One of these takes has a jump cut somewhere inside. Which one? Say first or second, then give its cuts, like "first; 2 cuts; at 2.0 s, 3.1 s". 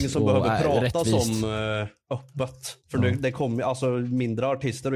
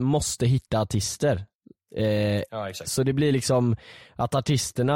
first; 1 cut; at 2.8 s